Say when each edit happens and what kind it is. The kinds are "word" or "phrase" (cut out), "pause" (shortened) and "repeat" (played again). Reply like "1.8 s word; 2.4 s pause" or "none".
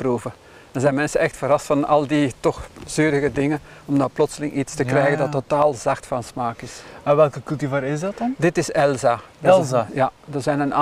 none